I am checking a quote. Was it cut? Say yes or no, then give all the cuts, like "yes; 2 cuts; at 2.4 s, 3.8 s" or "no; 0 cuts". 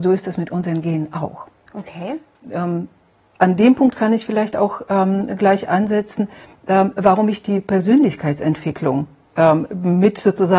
no; 0 cuts